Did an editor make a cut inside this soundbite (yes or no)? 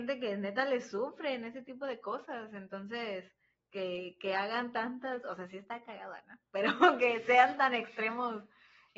no